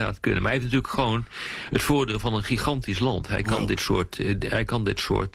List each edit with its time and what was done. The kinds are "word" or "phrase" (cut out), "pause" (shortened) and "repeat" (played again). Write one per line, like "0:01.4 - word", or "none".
none